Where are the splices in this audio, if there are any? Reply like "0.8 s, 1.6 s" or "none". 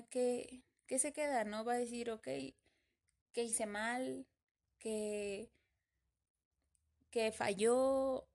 none